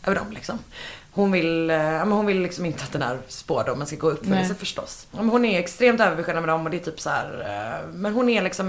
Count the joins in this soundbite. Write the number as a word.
zero